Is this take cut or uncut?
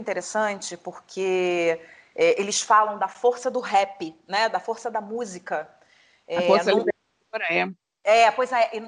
uncut